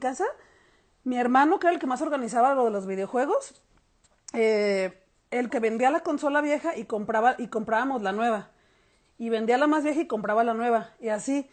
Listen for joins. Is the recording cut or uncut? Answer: cut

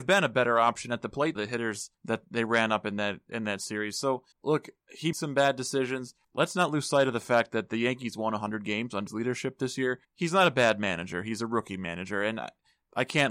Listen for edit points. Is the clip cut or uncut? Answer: cut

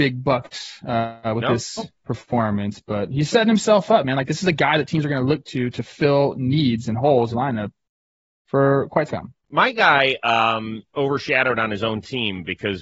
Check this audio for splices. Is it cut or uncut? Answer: cut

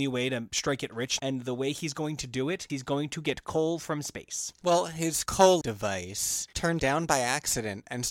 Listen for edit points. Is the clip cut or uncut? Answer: cut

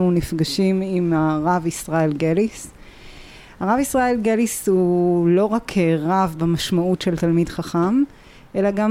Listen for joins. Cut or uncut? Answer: uncut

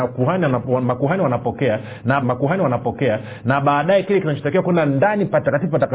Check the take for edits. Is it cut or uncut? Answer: cut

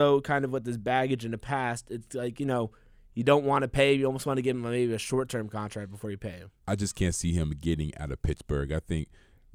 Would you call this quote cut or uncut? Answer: cut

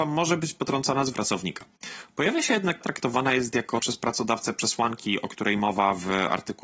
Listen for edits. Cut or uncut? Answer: cut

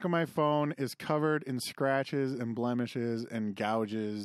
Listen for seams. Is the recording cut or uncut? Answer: uncut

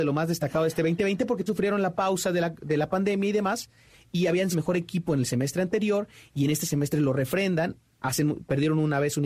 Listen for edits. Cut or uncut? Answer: cut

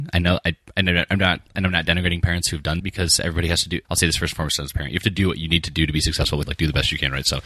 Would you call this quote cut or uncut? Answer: cut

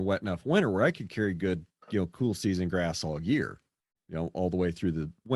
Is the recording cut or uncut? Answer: uncut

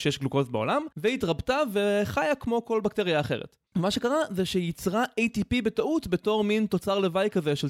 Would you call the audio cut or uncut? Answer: cut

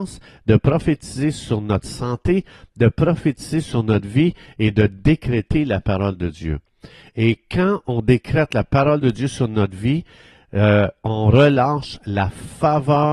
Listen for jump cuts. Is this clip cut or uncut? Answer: uncut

